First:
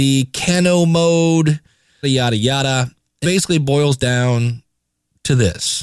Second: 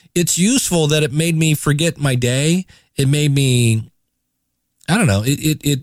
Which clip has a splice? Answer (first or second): first